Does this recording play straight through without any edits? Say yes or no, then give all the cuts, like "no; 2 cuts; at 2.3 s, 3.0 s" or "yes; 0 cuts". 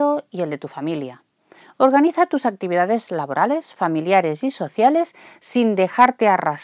yes; 0 cuts